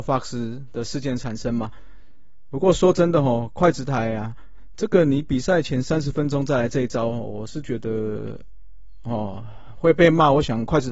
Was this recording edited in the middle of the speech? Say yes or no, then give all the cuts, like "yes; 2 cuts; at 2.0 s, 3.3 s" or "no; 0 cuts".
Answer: no; 0 cuts